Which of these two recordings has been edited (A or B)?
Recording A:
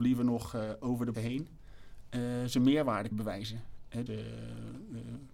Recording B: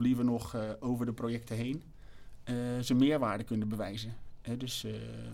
A